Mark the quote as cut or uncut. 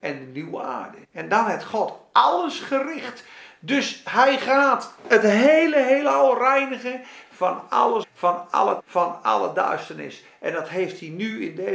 cut